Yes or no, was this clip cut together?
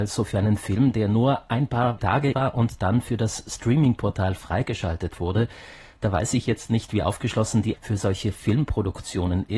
yes